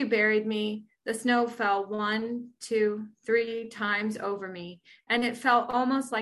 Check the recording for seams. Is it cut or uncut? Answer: uncut